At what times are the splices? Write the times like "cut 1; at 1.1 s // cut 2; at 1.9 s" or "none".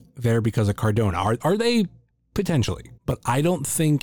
cut 1; at 1.4 s // cut 2; at 3.0 s